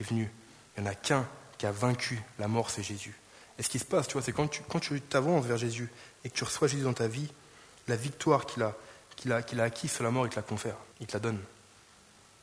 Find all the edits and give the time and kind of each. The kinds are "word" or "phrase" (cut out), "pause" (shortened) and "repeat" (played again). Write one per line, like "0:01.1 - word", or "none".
0:10.9 - pause